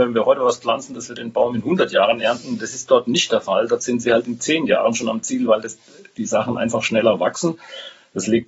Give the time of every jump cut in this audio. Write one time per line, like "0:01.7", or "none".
none